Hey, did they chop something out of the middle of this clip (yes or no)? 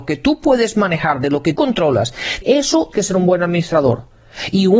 yes